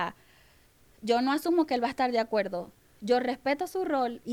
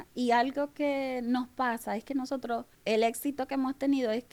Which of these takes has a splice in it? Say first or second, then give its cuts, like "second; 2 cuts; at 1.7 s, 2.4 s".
second; 1 cut; at 2.7 s